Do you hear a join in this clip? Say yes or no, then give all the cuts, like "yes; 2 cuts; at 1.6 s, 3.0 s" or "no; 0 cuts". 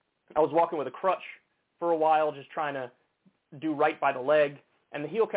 no; 0 cuts